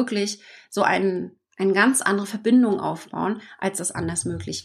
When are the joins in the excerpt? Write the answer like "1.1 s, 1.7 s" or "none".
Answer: none

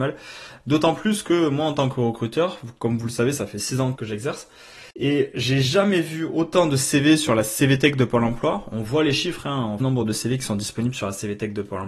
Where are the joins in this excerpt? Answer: 4.0 s, 4.9 s, 9.8 s

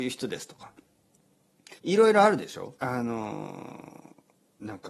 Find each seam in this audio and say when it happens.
1.8 s, 2.8 s

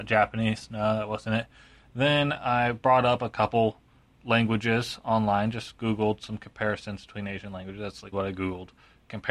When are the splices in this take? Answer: 8.1 s

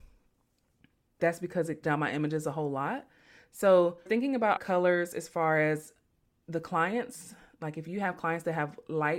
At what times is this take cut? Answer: 1.2 s, 1.8 s, 4.1 s, 4.6 s

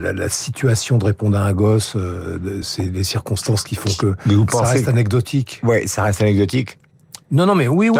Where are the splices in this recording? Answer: none

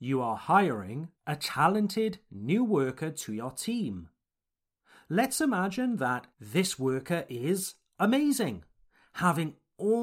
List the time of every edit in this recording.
1.1 s, 6.3 s

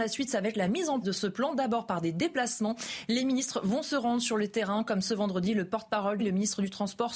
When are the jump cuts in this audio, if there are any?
1.0 s, 6.2 s

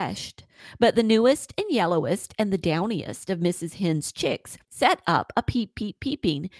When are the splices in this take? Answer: 4.6 s

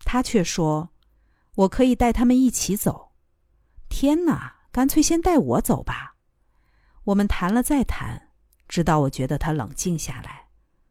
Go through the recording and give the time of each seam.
none

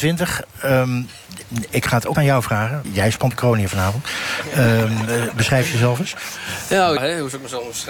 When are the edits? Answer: 2.1 s, 2.8 s, 3.3 s, 7.0 s

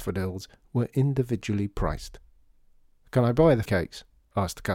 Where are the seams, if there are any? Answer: 3.6 s

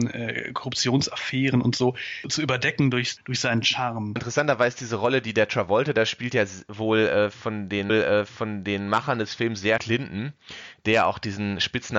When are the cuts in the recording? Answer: 7.9 s, 9.8 s

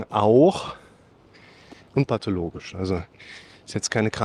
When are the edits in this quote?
1.9 s

